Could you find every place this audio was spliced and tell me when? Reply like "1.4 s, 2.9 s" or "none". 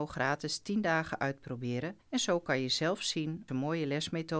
2.0 s, 3.5 s